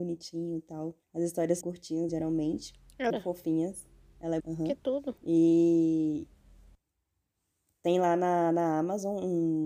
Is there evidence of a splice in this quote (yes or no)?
yes